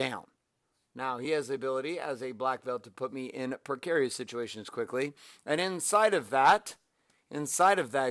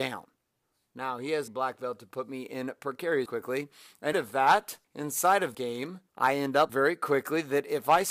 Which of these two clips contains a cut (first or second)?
second